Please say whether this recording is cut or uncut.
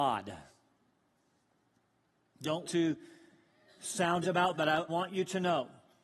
cut